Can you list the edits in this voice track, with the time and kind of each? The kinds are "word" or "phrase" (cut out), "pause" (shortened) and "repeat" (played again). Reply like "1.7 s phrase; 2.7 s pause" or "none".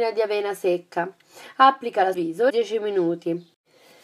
2.1 s word; 2.5 s phrase